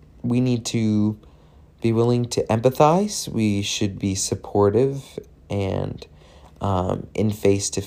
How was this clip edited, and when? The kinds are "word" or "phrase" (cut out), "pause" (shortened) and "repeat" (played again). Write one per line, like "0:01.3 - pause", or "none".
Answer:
none